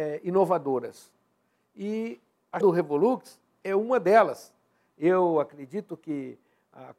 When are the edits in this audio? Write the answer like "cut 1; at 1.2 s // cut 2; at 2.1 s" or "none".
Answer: cut 1; at 2.6 s